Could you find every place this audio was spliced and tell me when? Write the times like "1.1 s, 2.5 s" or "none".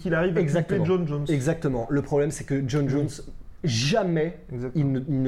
none